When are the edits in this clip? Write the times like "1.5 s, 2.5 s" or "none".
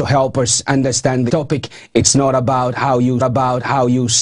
1.3 s, 3.2 s